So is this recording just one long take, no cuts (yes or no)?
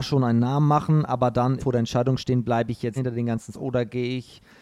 no